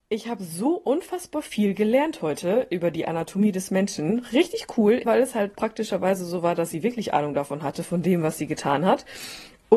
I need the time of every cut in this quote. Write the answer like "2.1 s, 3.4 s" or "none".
5.1 s